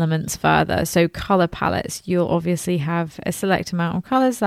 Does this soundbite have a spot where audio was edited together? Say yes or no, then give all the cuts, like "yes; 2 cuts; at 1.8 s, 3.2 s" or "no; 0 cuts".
no; 0 cuts